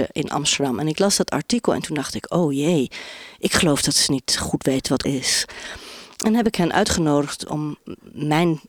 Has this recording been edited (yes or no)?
yes